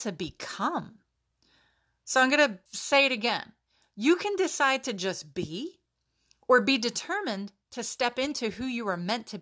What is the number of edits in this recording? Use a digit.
1